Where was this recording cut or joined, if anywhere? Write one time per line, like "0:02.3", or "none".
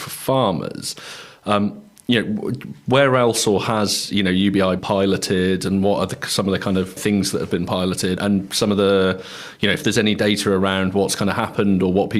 0:04.8
0:07.0
0:08.2